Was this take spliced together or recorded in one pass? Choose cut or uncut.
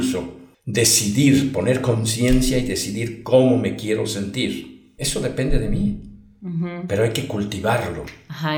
uncut